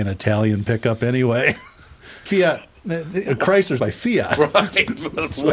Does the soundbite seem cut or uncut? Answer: cut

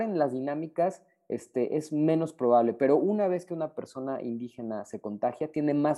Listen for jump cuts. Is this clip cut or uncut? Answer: uncut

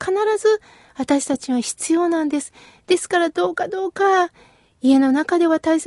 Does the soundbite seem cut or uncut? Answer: uncut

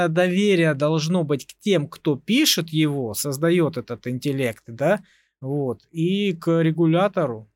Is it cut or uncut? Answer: uncut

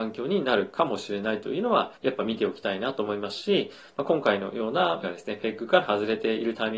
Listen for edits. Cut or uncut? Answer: cut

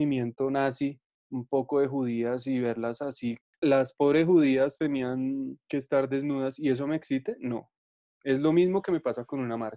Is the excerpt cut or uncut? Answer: uncut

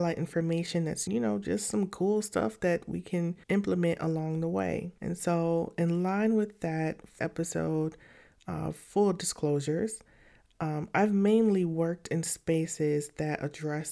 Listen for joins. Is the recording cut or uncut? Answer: cut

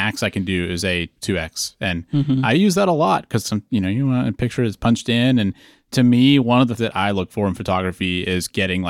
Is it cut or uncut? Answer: cut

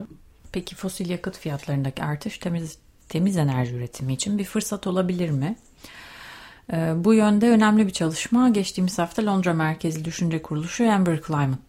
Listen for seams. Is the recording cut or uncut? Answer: uncut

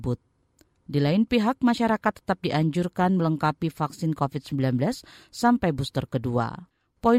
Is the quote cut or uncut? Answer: uncut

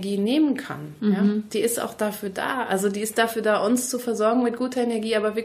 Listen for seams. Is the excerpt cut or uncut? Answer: uncut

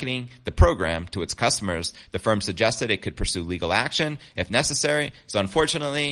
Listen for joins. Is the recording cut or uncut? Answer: uncut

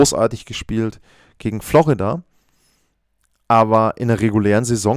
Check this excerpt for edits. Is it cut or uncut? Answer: uncut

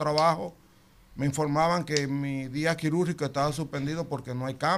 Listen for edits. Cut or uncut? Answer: uncut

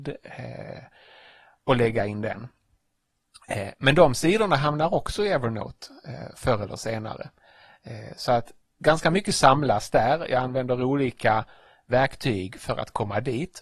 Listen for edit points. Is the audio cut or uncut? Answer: uncut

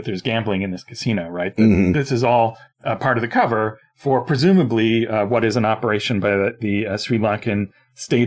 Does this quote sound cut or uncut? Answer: uncut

